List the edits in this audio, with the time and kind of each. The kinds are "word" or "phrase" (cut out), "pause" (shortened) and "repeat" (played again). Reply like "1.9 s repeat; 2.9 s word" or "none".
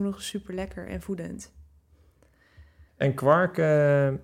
2.9 s pause